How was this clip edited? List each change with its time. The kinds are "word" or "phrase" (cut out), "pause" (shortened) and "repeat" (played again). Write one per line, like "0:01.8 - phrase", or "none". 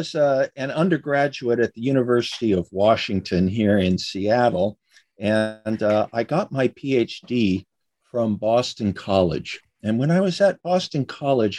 none